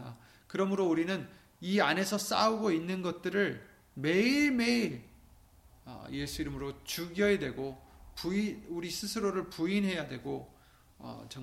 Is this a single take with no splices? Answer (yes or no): yes